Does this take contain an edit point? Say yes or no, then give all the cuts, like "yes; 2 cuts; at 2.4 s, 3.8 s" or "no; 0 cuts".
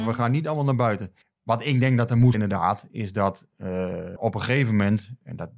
yes; 3 cuts; at 1.2 s, 2.3 s, 4.2 s